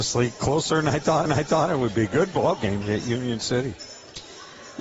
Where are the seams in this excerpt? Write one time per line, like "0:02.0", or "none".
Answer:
0:01.3
0:02.8